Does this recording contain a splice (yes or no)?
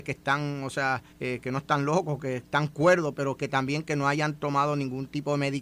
yes